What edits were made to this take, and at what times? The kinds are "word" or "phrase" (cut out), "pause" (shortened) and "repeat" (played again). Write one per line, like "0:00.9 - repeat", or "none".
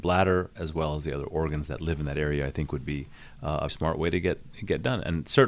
0:03.7 - word